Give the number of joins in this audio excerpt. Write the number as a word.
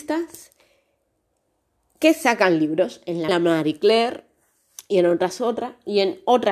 one